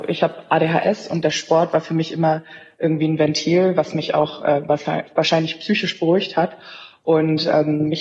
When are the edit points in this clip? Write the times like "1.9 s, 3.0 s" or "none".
none